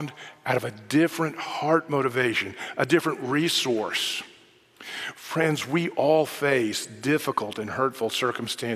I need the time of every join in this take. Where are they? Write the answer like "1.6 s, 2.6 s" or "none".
none